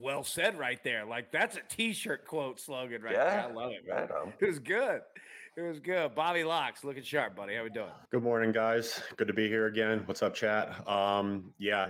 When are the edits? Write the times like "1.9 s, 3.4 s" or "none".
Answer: 4.4 s, 8.0 s